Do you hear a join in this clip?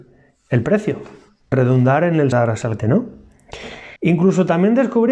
yes; 4 cuts; at 1.5 s, 2.3 s, 2.8 s, 4.0 s

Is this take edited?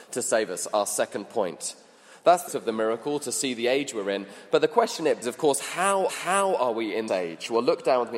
yes; 4 cuts; at 2.5 s, 5.2 s, 6.1 s, 7.1 s

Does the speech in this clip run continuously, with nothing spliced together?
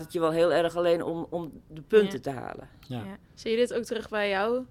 no; 1 cut; at 3.2 s

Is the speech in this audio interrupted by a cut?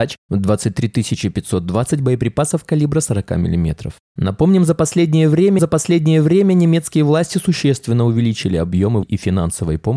yes; 2 cuts; at 5.6 s, 9.0 s

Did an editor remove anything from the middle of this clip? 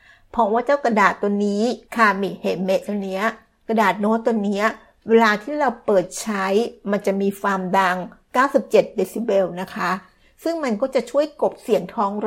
yes; 1 cut; at 1.9 s

